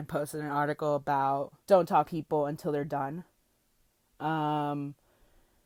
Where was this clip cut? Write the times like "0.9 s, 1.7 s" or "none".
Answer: 1.6 s, 2.0 s